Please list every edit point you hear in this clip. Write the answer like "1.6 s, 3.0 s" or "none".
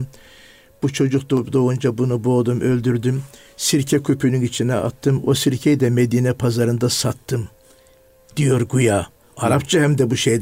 none